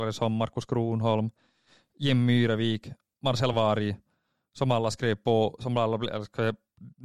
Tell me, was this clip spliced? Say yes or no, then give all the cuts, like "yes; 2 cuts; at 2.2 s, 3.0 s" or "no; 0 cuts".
no; 0 cuts